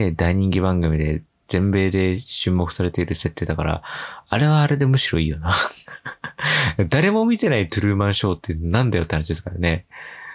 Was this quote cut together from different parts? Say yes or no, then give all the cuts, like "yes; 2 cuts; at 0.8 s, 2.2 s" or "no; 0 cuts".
no; 0 cuts